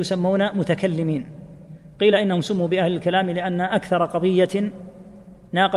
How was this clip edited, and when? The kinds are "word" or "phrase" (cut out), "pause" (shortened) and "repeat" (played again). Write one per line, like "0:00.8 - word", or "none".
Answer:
none